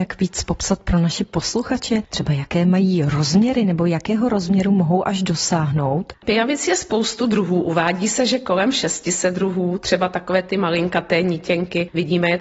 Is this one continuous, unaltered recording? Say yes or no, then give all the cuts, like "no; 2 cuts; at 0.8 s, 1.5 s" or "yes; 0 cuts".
yes; 0 cuts